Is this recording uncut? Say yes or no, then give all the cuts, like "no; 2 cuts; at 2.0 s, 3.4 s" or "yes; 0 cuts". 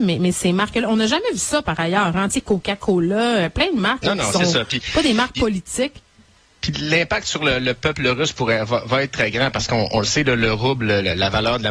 yes; 0 cuts